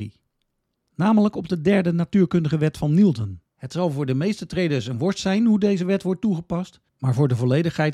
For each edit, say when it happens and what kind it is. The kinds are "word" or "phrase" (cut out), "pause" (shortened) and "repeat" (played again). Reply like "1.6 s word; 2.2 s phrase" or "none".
3.5 s pause; 6.9 s pause